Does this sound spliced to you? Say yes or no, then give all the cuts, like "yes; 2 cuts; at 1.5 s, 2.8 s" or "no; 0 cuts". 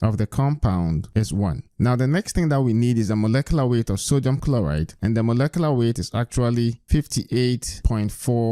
yes; 1 cut; at 1.7 s